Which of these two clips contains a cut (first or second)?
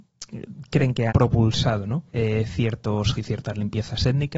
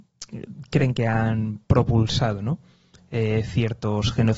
first